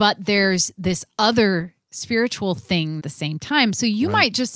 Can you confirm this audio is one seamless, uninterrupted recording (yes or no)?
no